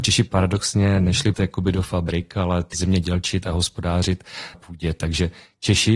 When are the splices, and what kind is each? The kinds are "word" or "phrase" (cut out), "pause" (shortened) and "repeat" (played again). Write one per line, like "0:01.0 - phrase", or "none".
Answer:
0:01.3 - word
0:02.7 - word
0:04.5 - word

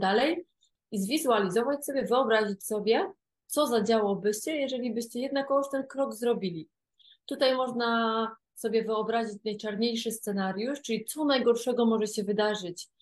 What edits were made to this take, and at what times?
none

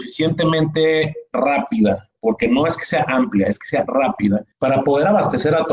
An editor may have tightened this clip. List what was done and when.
none

